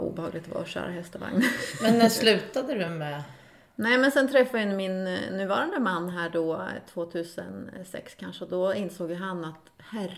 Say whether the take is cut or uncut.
uncut